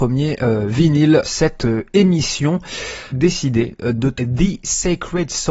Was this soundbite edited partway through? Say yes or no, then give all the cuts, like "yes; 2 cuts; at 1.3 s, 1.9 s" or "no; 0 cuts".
yes; 3 cuts; at 1.2 s, 3.1 s, 4.2 s